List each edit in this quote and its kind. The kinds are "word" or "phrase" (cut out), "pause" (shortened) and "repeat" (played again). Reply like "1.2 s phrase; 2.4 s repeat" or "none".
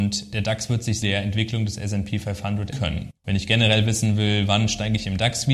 1.0 s word; 2.7 s word; 3.2 s pause